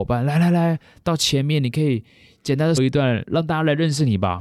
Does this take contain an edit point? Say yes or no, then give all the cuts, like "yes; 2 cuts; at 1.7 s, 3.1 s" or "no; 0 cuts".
yes; 1 cut; at 2.8 s